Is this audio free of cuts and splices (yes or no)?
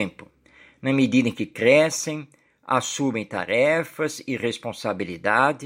yes